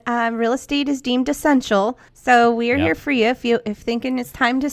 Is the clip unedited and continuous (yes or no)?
no